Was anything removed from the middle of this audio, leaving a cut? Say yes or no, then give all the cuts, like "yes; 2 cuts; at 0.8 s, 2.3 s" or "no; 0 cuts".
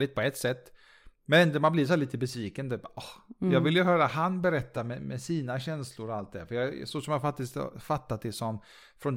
no; 0 cuts